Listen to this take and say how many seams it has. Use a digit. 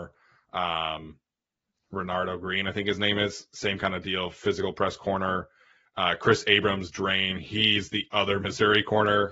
0